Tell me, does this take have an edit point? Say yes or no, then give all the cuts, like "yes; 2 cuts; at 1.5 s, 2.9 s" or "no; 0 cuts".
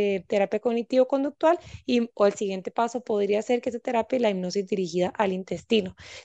no; 0 cuts